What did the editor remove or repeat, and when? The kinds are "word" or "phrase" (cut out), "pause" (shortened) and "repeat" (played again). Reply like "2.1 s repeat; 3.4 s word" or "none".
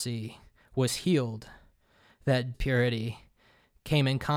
2.5 s word